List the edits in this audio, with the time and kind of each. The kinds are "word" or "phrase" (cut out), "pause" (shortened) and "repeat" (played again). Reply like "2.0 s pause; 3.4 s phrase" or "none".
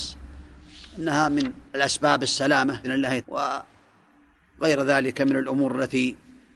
1.7 s pause; 2.8 s word; 3.2 s word